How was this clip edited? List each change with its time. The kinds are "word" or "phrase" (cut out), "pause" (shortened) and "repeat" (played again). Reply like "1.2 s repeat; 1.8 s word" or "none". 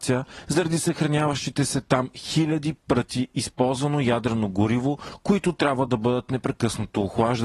none